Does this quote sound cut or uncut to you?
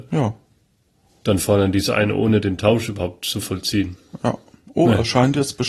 uncut